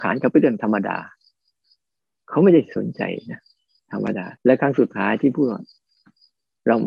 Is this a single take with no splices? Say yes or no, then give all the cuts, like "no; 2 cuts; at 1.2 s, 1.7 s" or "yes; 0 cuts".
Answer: no; 1 cut; at 4.4 s